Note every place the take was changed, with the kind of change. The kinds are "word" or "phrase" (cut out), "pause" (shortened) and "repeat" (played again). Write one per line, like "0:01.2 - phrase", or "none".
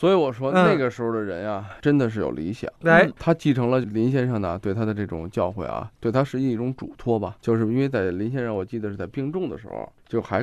0:02.7 - pause

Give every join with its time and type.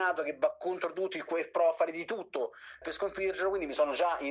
0:02.8 - word

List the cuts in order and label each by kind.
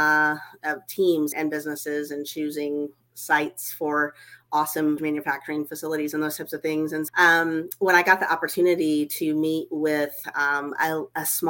0:01.3 - word
0:05.0 - word
0:07.1 - word

